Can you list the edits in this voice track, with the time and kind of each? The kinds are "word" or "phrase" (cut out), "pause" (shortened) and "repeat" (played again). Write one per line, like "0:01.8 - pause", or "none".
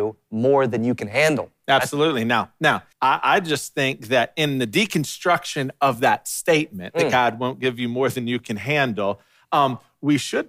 0:02.9 - pause